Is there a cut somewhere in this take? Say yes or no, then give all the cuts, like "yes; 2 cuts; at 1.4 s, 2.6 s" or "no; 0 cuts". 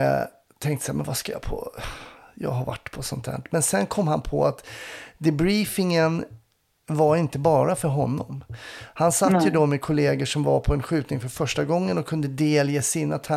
no; 0 cuts